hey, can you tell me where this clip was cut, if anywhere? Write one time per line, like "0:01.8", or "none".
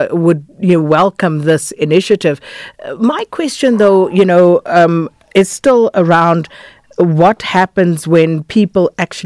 none

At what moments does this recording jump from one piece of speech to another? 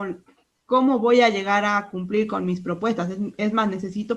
none

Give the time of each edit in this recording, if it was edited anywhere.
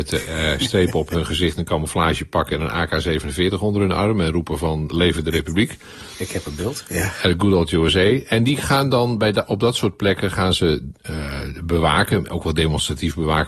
none

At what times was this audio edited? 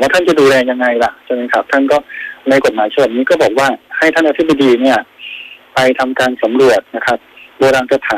0:06.9

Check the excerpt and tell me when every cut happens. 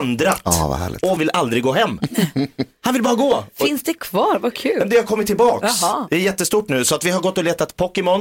0:01.2

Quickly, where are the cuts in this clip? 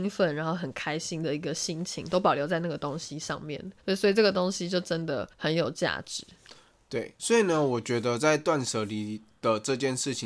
0:03.8
0:05.3
0:07.2

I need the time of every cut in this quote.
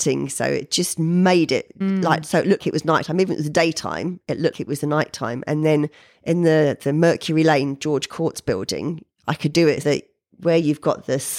0:01.8
0:02.6
0:04.5
0:06.0
0:09.8

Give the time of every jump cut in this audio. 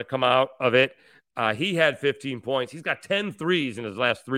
none

